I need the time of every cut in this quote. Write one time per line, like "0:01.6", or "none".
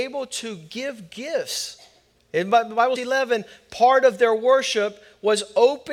0:02.2
0:03.0